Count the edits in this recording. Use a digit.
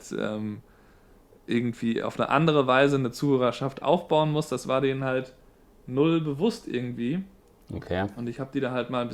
0